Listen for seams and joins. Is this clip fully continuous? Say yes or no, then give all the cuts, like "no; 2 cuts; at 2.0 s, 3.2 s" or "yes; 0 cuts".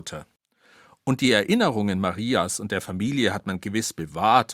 yes; 0 cuts